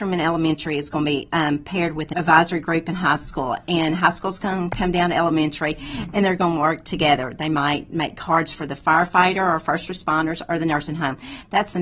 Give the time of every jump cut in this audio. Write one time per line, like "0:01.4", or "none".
0:02.1